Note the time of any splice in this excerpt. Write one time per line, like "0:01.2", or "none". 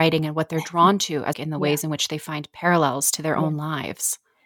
0:01.3